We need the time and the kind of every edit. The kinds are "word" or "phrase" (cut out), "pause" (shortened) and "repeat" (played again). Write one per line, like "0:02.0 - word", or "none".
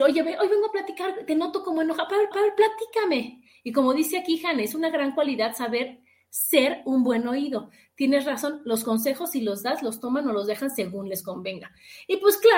0:02.3 - repeat